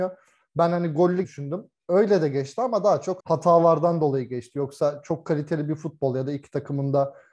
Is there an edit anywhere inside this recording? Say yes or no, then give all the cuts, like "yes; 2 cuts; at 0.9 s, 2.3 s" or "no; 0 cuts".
yes; 2 cuts; at 1.2 s, 3.2 s